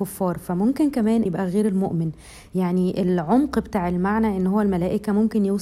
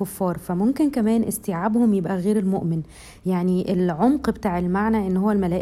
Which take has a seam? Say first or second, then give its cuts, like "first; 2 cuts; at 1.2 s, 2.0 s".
first; 1 cut; at 1.3 s